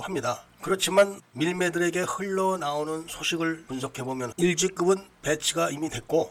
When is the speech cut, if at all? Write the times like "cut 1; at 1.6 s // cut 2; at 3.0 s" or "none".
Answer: cut 1; at 4.3 s